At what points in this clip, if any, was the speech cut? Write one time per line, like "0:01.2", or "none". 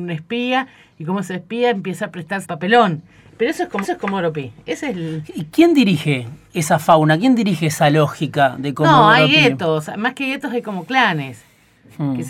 0:02.4
0:03.8
0:06.5